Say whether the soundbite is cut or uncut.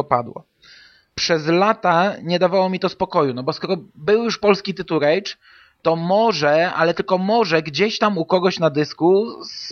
uncut